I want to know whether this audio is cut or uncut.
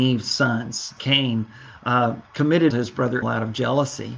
cut